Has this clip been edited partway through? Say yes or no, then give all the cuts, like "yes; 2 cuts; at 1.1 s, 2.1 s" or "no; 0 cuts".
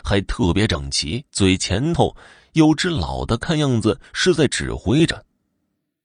yes; 1 cut; at 1.3 s